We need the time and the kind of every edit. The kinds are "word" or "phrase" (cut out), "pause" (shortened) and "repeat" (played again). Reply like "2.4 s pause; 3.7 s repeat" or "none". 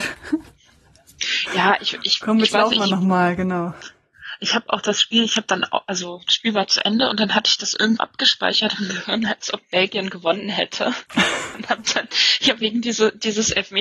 8.0 s word